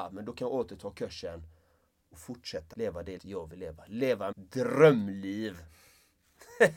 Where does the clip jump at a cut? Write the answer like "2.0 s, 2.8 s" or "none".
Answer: 2.7 s, 3.2 s, 4.3 s